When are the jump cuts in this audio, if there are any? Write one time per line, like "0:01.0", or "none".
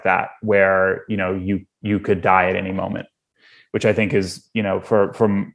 none